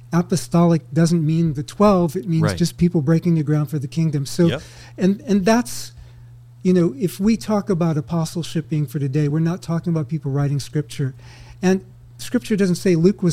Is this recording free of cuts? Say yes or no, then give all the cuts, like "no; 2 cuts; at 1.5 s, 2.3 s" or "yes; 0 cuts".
yes; 0 cuts